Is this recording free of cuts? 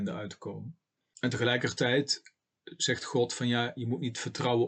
yes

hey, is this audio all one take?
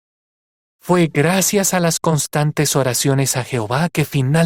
yes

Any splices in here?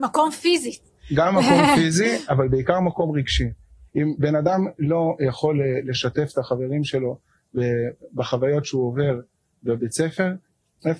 no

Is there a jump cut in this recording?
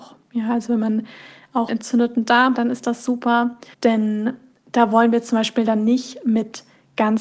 yes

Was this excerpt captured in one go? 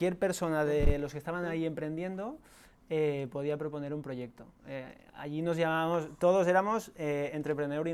yes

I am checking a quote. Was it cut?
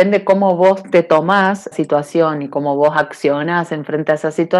yes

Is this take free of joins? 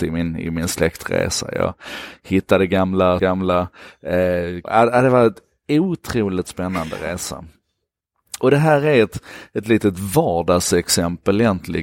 no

